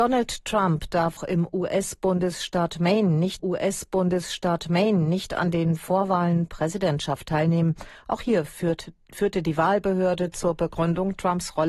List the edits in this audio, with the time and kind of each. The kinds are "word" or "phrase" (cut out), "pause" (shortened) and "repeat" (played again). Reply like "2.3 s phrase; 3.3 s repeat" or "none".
1.2 s word; 3.4 s repeat; 6.5 s word